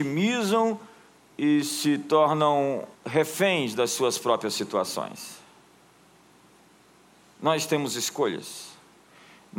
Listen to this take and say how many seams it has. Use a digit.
1